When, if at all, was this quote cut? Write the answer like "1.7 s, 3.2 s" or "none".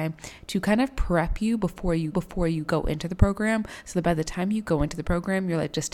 2.1 s